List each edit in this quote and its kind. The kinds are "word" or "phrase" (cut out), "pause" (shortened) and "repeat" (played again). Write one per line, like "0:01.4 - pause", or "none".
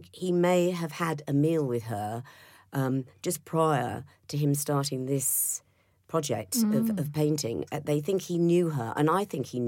none